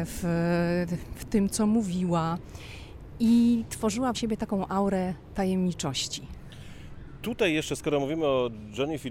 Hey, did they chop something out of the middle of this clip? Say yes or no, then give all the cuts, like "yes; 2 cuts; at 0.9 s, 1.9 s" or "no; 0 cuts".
yes; 1 cut; at 4.1 s